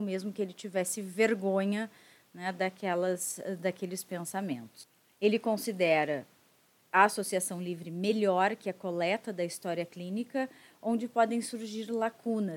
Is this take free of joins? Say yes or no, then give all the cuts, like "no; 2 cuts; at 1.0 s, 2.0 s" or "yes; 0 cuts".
yes; 0 cuts